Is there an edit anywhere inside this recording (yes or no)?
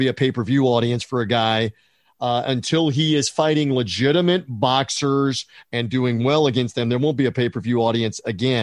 no